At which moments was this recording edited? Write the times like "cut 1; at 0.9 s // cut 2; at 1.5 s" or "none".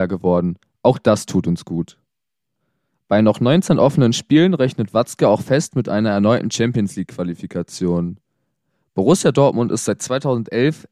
none